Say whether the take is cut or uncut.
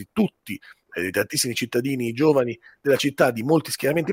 uncut